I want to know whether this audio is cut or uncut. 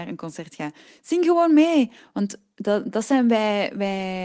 uncut